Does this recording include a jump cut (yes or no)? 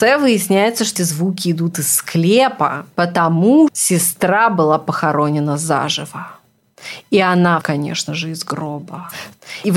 yes